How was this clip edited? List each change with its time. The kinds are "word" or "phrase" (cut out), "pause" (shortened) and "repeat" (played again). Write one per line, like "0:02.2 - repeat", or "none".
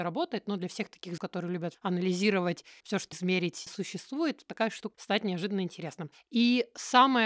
0:01.2 - word
0:01.7 - word
0:02.8 - word
0:03.1 - word
0:03.7 - word
0:04.9 - word

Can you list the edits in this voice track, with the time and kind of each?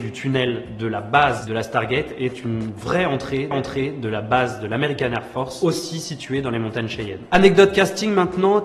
0:03.5 - repeat

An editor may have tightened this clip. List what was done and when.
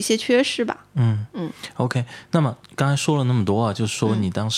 0:02.6 - pause

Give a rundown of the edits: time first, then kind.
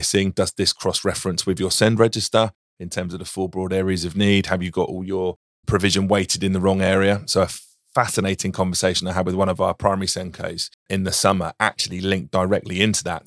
0:10.8 - pause

